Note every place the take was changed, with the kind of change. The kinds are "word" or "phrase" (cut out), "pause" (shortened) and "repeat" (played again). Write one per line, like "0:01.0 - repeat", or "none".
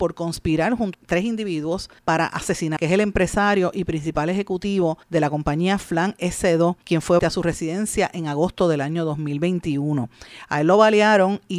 0:00.9 - word
0:02.0 - pause
0:02.8 - phrase
0:05.0 - pause
0:06.8 - pause
0:07.2 - phrase